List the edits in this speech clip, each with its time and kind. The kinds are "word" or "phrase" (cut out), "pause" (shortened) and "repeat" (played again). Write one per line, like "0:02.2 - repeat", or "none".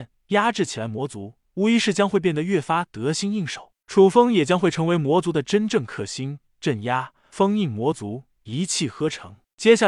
none

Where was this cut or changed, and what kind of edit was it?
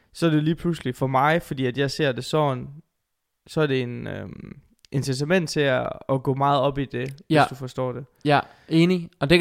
none

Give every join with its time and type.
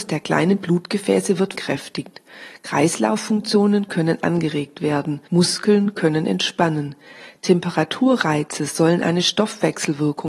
0:01.5 - phrase
0:05.3 - pause

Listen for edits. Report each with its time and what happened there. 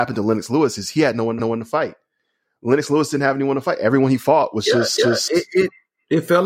0:01.4 - repeat
0:05.0 - repeat

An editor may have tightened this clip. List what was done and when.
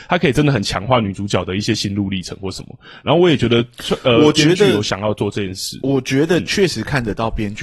none

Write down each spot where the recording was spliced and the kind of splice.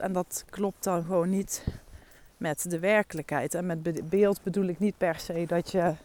none

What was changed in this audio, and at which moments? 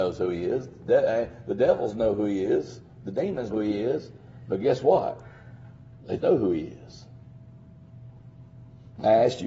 0:03.5 - word
0:06.2 - word

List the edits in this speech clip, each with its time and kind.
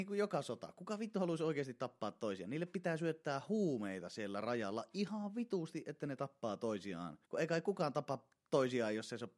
0:07.2 - pause

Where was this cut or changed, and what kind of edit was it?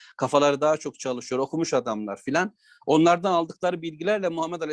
none

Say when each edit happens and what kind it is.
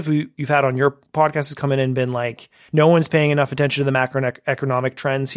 none

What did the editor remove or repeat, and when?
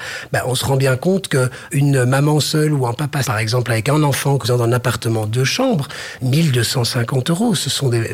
0:01.7 - word
0:03.2 - word
0:04.4 - word
0:06.2 - word

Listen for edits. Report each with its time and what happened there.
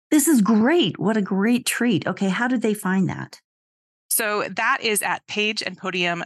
none

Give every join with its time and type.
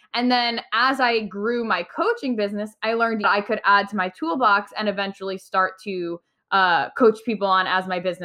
0:03.2 - phrase

